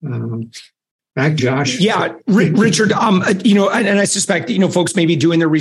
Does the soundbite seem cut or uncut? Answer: cut